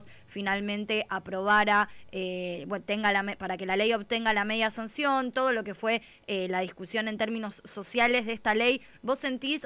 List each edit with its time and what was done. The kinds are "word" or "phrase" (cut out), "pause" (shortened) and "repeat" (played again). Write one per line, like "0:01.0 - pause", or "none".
none